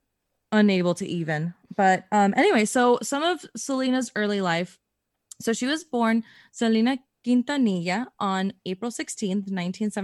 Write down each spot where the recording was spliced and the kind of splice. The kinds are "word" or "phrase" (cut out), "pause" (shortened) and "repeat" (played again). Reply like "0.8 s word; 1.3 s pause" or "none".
none